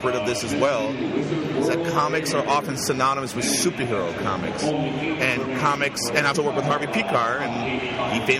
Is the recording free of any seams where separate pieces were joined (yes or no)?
no